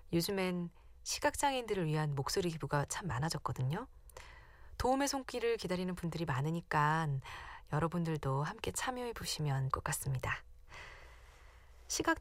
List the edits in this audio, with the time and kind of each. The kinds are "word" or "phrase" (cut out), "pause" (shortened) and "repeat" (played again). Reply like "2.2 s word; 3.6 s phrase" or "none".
9.7 s word